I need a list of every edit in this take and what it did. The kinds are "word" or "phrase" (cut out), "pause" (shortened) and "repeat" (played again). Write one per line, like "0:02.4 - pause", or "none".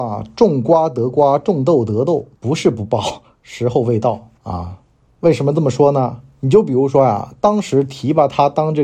0:02.3 - pause
0:04.4 - pause